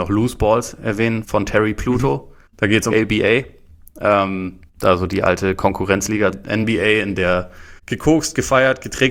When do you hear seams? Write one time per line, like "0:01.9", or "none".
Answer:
0:01.2
0:02.5
0:02.9
0:04.7
0:06.3
0:07.8